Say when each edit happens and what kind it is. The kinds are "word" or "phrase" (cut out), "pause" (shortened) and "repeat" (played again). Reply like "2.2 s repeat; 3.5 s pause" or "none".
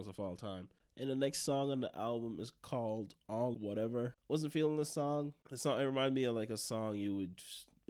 3.5 s word